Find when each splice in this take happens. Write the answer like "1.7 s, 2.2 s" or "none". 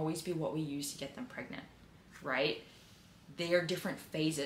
none

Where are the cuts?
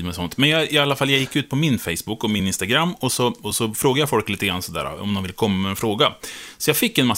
none

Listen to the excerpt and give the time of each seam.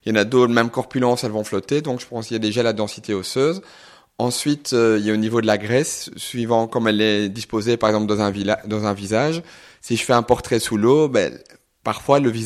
none

